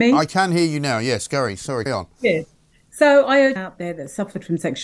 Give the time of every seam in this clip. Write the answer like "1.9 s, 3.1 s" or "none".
1.9 s, 3.6 s

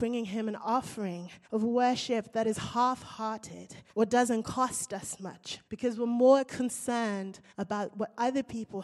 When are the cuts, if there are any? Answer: 1.4 s, 3.9 s, 5.6 s, 7.5 s

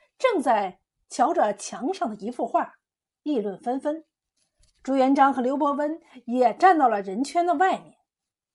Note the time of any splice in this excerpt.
4.4 s

